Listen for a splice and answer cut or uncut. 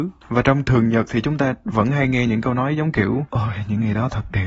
uncut